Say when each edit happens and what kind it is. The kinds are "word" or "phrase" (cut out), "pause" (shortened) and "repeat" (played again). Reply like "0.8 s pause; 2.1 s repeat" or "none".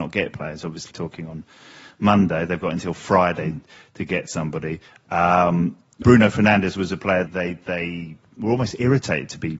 0.9 s word; 6.0 s word; 7.3 s word